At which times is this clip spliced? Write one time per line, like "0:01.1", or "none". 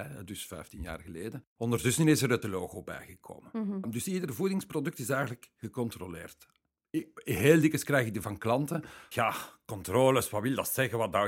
0:02.4
0:08.2
0:09.1